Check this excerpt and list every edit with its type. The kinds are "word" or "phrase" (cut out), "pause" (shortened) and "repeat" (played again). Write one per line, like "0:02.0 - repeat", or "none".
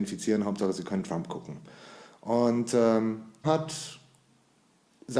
0:03.4 - word